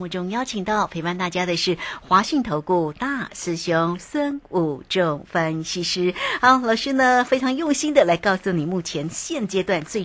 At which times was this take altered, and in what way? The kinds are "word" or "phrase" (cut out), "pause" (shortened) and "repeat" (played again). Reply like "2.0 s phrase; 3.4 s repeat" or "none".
none